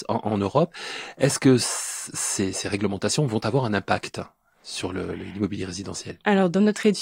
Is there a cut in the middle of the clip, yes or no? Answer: no